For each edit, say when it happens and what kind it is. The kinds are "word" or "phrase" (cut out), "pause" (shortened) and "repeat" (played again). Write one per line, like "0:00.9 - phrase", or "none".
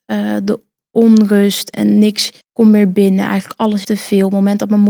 0:01.7 - word
0:02.4 - pause
0:03.8 - word